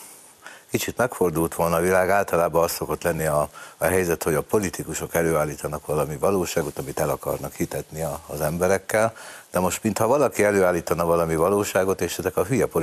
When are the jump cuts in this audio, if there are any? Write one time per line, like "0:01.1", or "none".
none